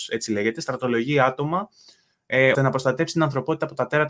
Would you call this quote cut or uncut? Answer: cut